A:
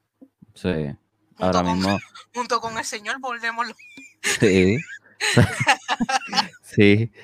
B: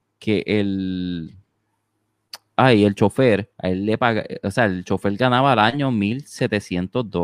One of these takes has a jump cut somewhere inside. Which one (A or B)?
B